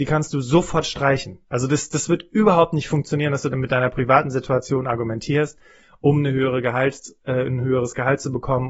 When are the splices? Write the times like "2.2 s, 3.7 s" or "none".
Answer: none